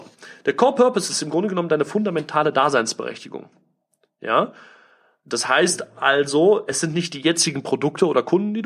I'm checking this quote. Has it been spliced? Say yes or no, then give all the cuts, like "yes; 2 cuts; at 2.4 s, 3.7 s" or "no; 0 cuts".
no; 0 cuts